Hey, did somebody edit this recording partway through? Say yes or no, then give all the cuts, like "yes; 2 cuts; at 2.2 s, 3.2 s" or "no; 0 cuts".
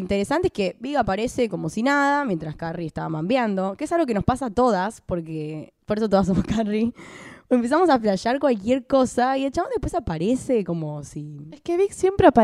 no; 0 cuts